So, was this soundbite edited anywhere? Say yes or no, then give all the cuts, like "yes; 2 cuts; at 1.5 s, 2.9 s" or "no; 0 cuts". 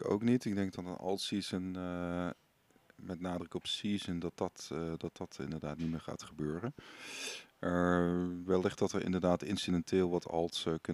no; 0 cuts